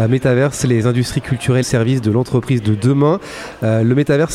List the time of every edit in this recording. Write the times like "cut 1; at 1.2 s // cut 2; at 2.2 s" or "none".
cut 1; at 1.6 s